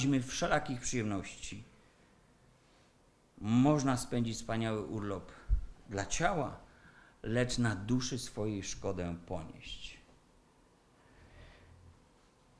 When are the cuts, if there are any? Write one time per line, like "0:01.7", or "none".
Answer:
none